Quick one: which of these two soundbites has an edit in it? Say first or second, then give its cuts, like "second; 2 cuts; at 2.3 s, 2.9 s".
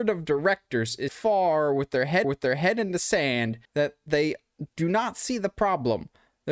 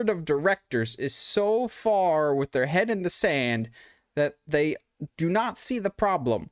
first; 3 cuts; at 1.1 s, 2.2 s, 3.6 s